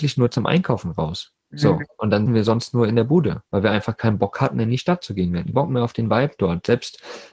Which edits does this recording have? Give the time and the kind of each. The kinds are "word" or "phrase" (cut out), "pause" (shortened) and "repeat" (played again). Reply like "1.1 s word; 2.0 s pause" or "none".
1.4 s pause; 2.3 s word; 3.5 s pause; 5.5 s word